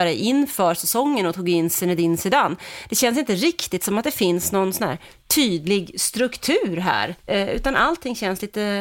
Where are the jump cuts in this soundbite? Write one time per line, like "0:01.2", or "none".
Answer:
0:07.2